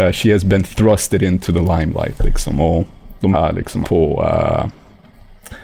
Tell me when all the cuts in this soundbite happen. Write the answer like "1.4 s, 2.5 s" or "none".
3.3 s, 3.8 s